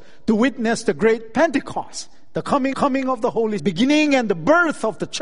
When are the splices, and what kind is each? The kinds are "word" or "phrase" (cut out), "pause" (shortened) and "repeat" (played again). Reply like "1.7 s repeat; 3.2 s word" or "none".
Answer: 2.7 s repeat; 3.6 s phrase